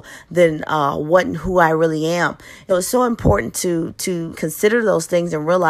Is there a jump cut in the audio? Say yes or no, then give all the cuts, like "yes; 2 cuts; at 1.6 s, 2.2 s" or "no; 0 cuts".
yes; 2 cuts; at 2.7 s, 4.3 s